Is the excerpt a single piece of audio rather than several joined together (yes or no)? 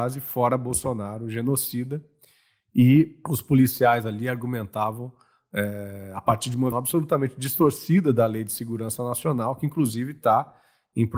no